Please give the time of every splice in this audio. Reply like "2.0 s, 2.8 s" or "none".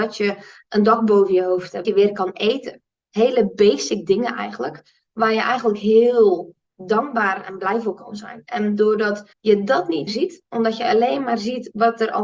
1.8 s, 6.6 s, 9.3 s, 10.1 s